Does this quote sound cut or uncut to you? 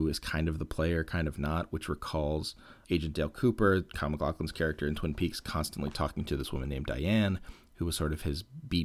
cut